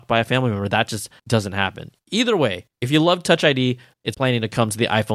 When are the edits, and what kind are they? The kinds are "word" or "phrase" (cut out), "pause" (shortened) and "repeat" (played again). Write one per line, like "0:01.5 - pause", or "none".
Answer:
0:01.2 - pause
0:02.7 - pause
0:04.1 - word

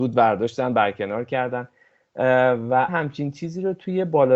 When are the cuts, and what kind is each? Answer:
0:02.9 - word

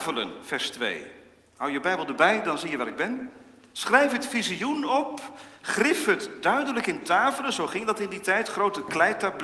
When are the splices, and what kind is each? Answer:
none

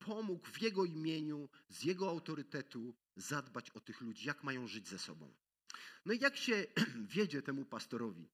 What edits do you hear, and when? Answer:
none

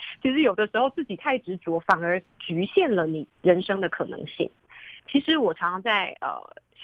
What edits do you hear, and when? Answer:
0:05.0 - pause

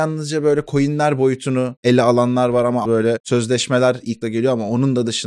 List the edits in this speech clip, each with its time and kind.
0:02.9 - word
0:04.2 - phrase

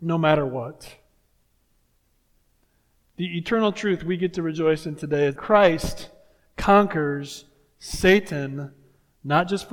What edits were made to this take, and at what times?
0:05.4 - word

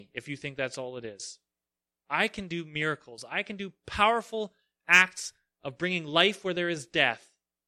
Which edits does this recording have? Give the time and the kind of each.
none

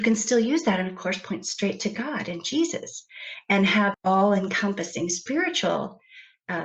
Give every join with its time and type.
0:03.9 - word

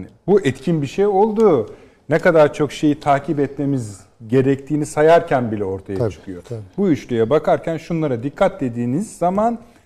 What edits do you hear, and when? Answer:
none

